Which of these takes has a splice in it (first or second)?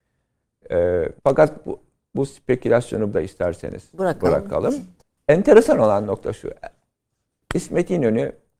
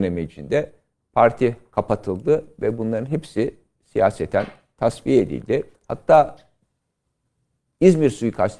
first